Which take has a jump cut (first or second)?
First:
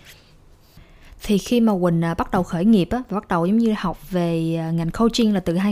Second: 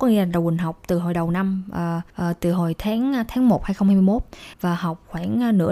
second